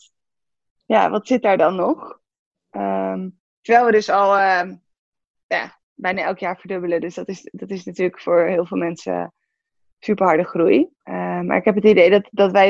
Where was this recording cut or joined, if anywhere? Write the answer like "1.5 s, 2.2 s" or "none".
none